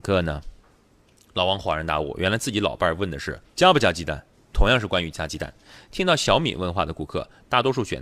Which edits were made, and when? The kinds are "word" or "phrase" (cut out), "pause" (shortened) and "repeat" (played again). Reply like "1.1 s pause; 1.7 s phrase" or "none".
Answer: 3.4 s word; 4.3 s pause